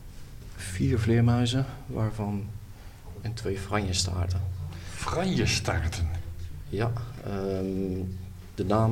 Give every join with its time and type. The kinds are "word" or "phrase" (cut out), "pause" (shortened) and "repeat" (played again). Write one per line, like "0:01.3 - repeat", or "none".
0:03.2 - phrase

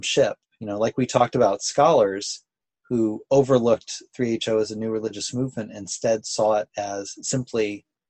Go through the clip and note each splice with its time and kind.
none

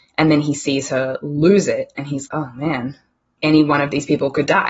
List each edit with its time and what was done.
0:02.3 - word

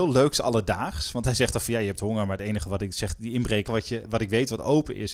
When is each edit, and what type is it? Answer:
0:03.7 - phrase

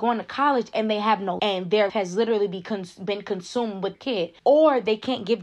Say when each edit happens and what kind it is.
0:01.4 - word
0:01.9 - word
0:03.9 - word
0:04.4 - pause

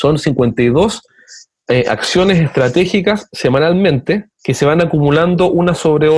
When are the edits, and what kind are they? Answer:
0:04.3 - pause

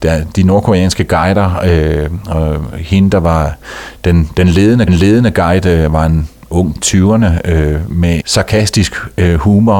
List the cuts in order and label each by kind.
0:04.9 - repeat
0:06.7 - word
0:08.2 - phrase

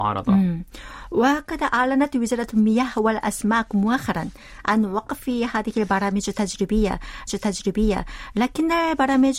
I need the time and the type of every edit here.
0:07.3 - repeat

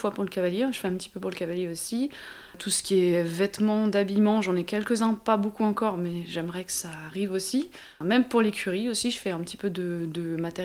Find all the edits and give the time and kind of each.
none

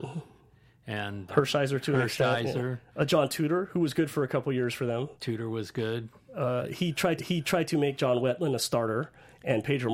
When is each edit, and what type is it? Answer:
0:01.3 - word
0:07.2 - repeat

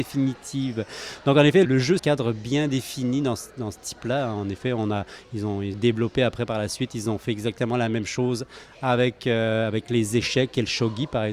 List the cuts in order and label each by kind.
0:01.6 - word
0:02.0 - phrase
0:05.7 - word

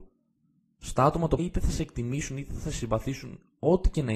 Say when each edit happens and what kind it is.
0:01.4 - word

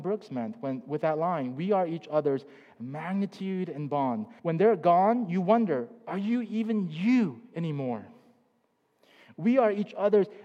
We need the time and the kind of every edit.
0:04.4 - pause

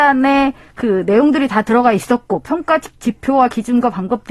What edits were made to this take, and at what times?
none

